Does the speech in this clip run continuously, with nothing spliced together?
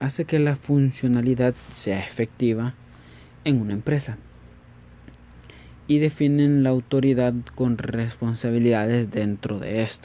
no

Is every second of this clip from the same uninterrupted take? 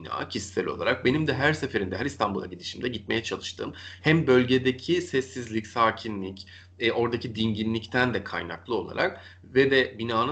yes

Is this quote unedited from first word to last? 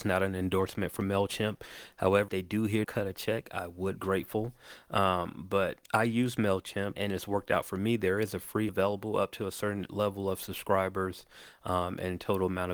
no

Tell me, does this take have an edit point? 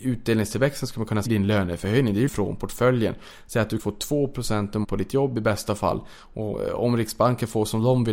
yes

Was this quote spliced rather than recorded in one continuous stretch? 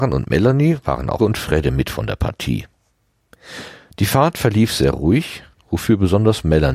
yes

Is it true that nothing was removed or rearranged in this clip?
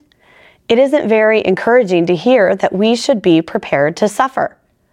yes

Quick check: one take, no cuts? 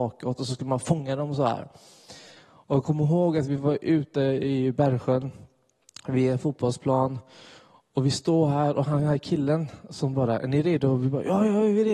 yes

